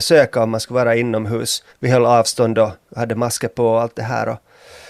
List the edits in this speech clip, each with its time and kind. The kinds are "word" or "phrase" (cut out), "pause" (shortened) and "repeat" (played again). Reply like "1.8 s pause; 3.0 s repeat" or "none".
1.7 s pause